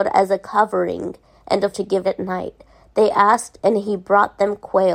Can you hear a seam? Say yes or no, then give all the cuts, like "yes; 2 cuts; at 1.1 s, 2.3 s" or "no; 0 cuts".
yes; 2 cuts; at 1.7 s, 2.0 s